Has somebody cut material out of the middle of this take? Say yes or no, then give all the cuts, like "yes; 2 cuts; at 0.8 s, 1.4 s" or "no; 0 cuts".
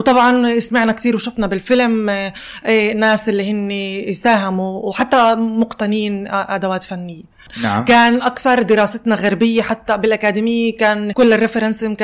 no; 0 cuts